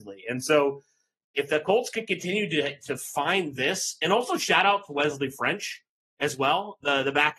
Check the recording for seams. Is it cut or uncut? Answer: uncut